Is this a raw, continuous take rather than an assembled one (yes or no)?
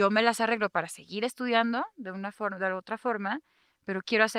yes